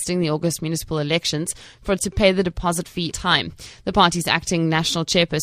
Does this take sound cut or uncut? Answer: cut